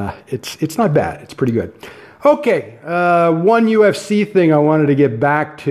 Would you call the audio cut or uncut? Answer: uncut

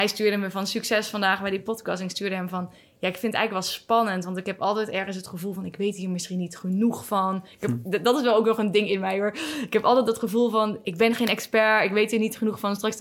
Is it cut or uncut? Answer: uncut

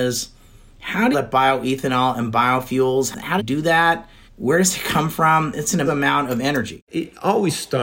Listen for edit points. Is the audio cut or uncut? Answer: cut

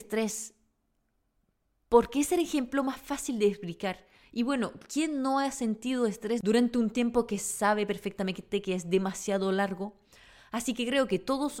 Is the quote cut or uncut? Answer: uncut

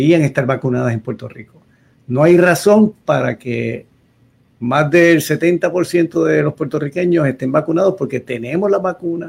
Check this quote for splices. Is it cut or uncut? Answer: uncut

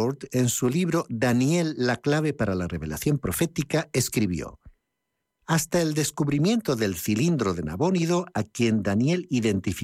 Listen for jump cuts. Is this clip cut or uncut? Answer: uncut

